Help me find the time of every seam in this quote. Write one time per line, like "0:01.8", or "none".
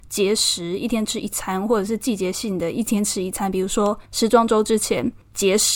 0:04.0